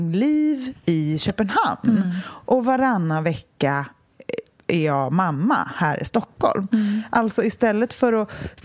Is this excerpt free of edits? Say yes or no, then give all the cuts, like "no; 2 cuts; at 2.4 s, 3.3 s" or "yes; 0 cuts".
yes; 0 cuts